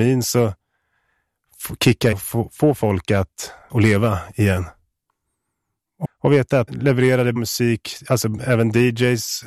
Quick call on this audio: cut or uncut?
cut